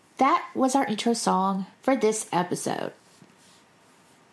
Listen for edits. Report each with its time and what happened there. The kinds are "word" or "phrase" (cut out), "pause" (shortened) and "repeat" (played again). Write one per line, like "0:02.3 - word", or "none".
0:01.7 - pause